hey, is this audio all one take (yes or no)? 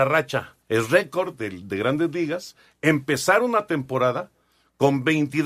yes